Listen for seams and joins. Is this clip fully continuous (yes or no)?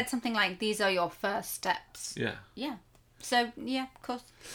yes